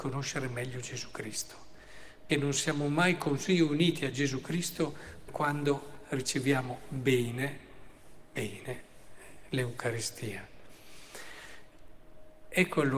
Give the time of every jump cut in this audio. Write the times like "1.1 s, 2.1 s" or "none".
2.3 s, 5.3 s